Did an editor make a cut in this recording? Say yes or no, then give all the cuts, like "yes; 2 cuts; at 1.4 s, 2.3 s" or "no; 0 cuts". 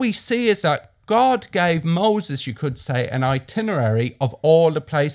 no; 0 cuts